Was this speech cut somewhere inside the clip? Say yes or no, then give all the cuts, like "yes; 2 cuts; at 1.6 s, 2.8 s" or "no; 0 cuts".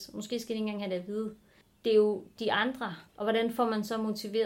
yes; 2 cuts; at 1.6 s, 3.1 s